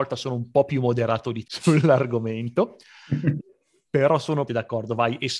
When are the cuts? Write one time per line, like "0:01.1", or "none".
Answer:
0:01.4
0:03.4
0:04.5